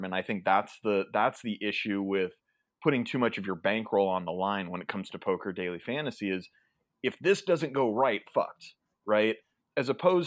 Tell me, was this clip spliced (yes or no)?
yes